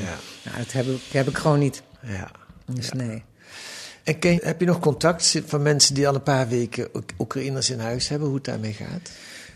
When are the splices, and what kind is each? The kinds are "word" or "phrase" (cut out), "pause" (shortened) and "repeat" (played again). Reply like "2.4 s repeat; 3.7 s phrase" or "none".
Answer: 4.4 s word